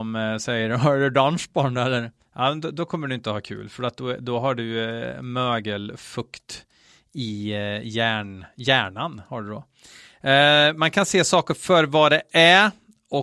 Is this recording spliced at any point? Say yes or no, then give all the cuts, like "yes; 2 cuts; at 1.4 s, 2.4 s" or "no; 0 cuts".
no; 0 cuts